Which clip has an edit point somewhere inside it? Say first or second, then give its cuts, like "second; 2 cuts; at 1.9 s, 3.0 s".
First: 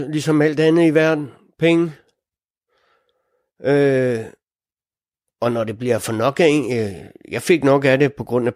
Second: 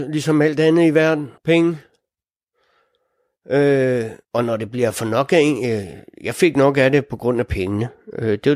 second; 2 cuts; at 1.4 s, 4.2 s